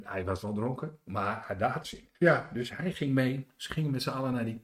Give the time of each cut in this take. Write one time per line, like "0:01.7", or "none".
0:01.8
0:02.1